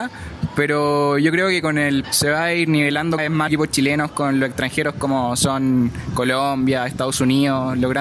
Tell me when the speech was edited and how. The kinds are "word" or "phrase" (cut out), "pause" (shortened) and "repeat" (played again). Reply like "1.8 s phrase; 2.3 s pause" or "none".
2.0 s phrase; 3.2 s word; 3.5 s word